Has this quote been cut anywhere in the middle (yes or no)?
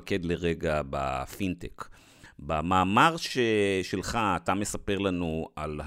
no